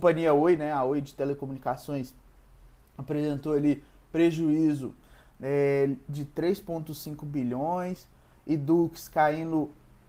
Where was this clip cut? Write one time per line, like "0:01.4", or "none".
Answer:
none